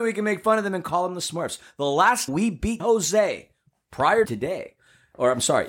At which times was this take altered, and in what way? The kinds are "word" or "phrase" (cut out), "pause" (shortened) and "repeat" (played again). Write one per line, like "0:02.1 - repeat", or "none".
0:02.3 - word
0:02.8 - word
0:04.2 - word